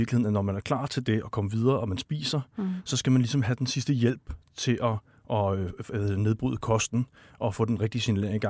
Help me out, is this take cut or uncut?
uncut